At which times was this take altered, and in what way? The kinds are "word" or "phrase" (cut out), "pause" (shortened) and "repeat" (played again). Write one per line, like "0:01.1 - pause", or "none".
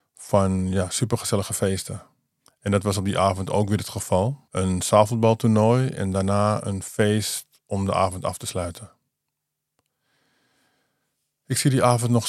0:02.4 - pause
0:04.5 - pause